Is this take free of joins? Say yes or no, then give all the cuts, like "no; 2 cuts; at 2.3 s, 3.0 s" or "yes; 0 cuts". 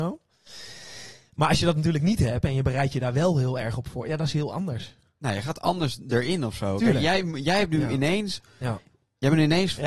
yes; 0 cuts